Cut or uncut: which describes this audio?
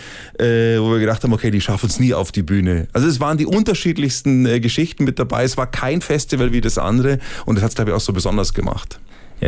uncut